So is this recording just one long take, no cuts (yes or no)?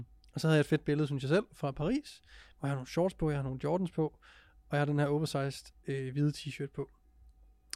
yes